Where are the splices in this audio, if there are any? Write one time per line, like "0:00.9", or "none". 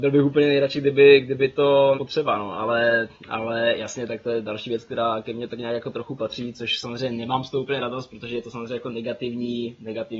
0:01.9